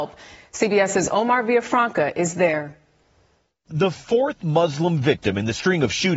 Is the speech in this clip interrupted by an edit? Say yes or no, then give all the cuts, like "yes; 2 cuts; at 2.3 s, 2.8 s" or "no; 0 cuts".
no; 0 cuts